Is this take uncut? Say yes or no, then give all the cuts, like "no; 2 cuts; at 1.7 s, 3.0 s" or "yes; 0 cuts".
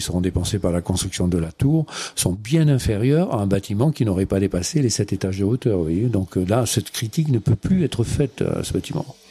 yes; 0 cuts